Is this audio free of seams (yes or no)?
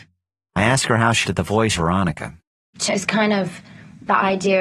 no